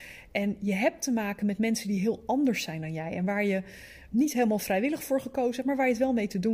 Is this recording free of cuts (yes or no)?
no